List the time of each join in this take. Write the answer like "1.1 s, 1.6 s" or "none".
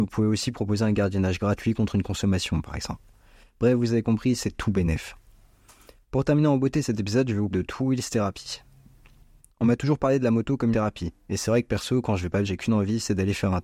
7.5 s, 10.7 s, 12.4 s